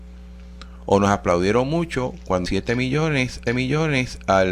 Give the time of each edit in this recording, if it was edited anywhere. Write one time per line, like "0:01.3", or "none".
0:02.5
0:03.5

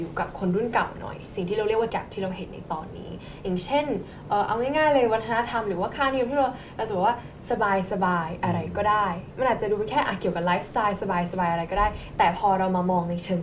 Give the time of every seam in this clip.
0:01.9

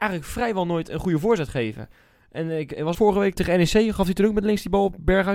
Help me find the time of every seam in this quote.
0:02.9
0:03.3

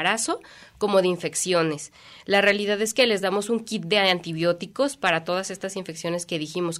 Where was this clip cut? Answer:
none

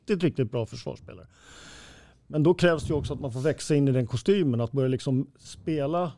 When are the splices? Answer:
none

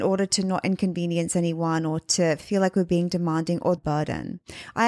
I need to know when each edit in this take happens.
0:03.8

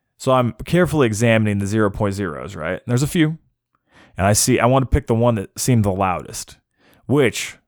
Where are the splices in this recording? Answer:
none

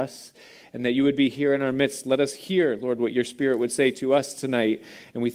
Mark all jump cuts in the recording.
none

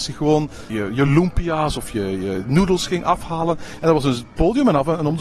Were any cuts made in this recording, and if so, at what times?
none

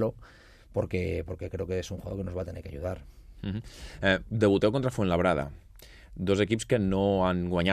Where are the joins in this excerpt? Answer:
none

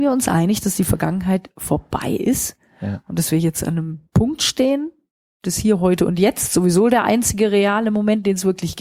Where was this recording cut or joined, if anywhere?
0:04.1

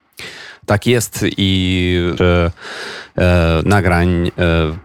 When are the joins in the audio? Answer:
0:02.2

